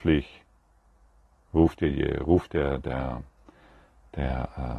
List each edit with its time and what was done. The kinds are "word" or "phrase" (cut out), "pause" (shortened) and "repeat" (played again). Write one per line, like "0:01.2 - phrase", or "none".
none